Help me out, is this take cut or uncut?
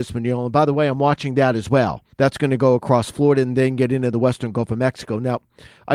cut